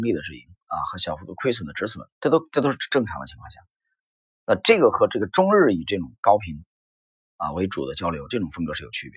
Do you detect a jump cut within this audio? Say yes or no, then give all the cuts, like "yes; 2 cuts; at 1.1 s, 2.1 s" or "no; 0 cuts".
yes; 1 cut; at 2.1 s